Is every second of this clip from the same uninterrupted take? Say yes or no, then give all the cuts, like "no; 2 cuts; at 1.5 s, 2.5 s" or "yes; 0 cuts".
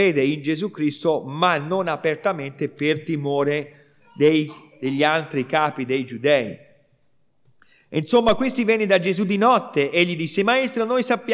yes; 0 cuts